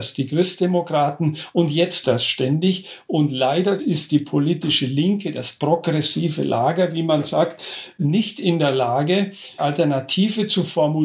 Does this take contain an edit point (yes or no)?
yes